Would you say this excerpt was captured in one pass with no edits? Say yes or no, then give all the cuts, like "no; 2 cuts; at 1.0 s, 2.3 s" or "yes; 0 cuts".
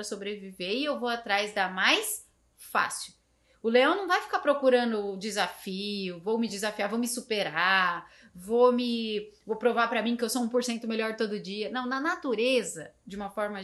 yes; 0 cuts